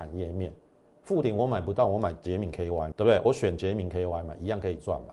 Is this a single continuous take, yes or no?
no